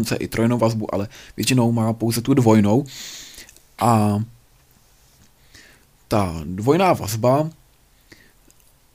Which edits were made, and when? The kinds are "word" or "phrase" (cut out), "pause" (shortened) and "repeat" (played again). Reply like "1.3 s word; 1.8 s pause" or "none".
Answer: none